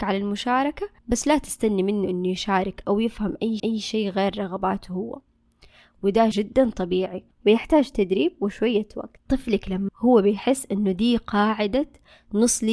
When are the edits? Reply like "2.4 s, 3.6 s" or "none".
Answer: 1.0 s, 3.6 s, 6.3 s, 9.9 s